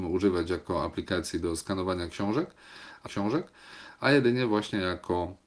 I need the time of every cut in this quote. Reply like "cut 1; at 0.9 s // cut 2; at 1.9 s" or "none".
cut 1; at 3.1 s